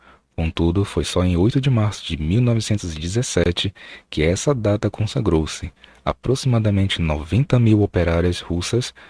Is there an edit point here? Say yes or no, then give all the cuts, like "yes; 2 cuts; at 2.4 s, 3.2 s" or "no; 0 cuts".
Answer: no; 0 cuts